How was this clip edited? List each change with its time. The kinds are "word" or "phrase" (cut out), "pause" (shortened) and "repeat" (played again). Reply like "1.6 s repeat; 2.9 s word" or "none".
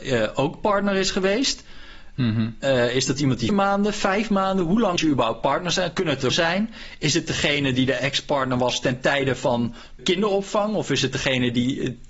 3.5 s word; 5.0 s word; 6.3 s word; 10.0 s word